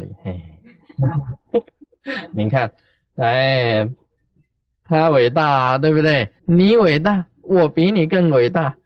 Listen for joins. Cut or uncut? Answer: cut